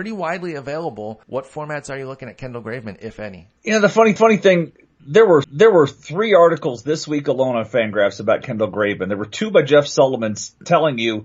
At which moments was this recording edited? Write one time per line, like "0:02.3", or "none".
0:01.2
0:03.6
0:04.2
0:05.4